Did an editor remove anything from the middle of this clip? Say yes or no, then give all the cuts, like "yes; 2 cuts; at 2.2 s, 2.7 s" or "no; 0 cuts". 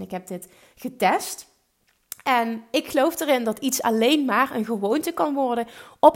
no; 0 cuts